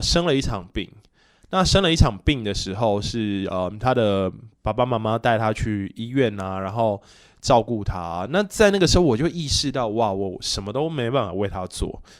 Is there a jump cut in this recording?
no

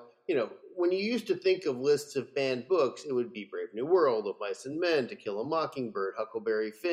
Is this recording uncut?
yes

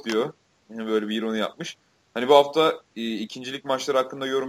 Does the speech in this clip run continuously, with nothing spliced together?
yes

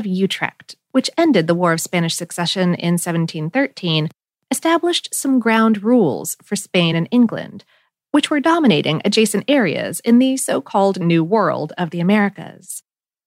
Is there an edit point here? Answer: no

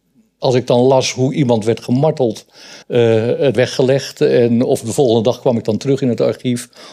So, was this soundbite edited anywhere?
yes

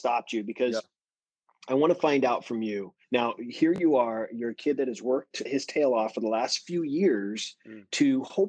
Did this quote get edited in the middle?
yes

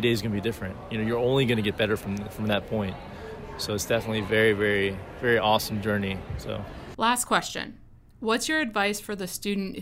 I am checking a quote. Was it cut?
no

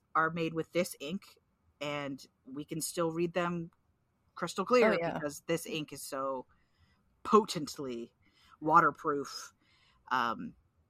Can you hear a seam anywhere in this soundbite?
no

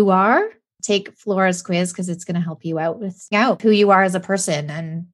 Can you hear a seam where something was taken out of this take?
yes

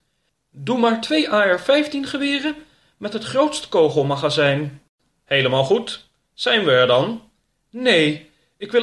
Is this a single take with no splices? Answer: yes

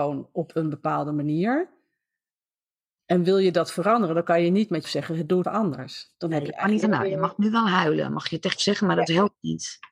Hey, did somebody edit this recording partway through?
yes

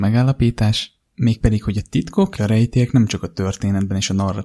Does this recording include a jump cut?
yes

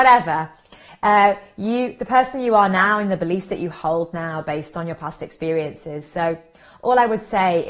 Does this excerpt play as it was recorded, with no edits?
yes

